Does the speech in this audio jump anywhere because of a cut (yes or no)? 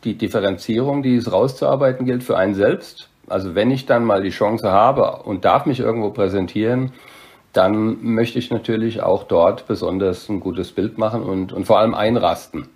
no